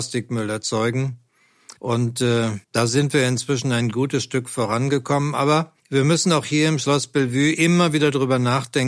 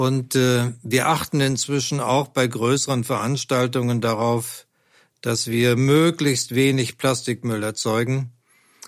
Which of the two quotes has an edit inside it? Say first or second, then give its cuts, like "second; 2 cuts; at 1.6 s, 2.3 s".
first; 3 cuts; at 1.8 s, 2.6 s, 5.8 s